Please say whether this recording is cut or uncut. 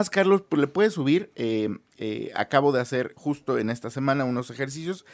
uncut